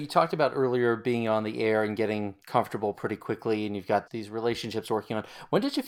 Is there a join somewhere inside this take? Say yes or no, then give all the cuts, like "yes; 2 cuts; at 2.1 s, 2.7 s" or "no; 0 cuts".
yes; 2 cuts; at 2.4 s, 4.1 s